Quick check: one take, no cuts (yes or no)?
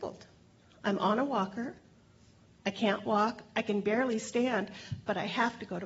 yes